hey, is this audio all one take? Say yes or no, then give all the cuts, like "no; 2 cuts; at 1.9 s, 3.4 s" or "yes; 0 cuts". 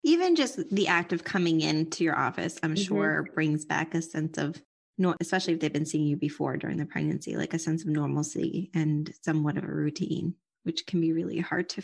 yes; 0 cuts